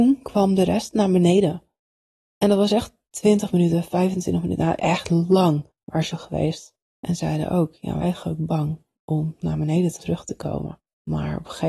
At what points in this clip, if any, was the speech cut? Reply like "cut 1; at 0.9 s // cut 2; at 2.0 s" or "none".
cut 1; at 4.8 s // cut 2; at 6.1 s // cut 3; at 7.2 s // cut 4; at 8.0 s // cut 5; at 9.4 s // cut 6; at 10.0 s